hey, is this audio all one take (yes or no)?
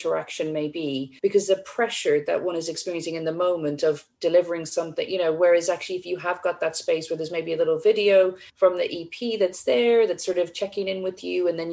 no